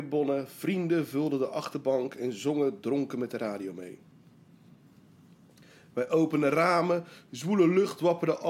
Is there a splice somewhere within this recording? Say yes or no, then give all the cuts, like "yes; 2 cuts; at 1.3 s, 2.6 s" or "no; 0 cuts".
no; 0 cuts